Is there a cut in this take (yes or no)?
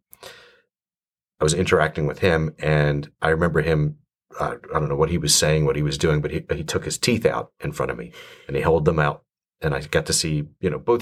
no